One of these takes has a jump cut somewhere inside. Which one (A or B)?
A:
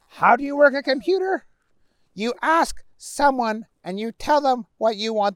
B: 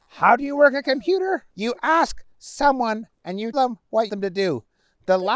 B